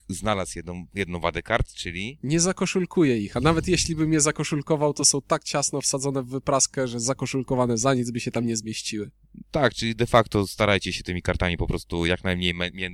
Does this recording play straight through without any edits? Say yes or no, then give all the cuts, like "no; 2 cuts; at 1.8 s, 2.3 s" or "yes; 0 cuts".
yes; 0 cuts